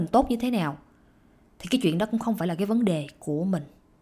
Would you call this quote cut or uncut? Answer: uncut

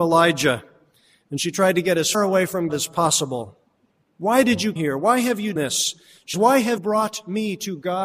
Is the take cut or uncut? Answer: cut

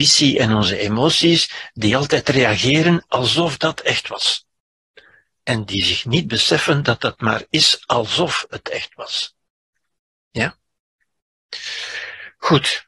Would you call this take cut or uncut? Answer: uncut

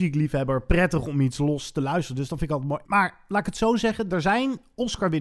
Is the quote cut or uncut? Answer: uncut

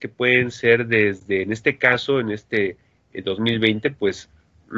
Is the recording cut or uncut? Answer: uncut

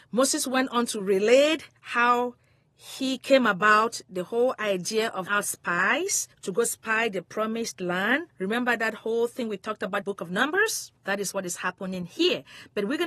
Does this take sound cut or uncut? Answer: cut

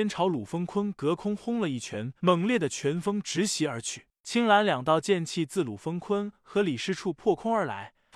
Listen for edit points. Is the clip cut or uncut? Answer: cut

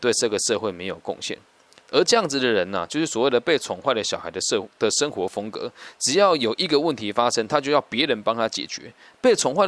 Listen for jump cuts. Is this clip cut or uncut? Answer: uncut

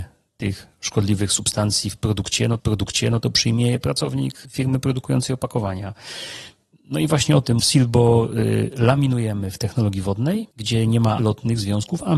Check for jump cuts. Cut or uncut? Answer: cut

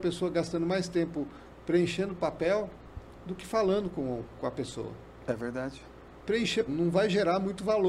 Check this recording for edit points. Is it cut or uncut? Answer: cut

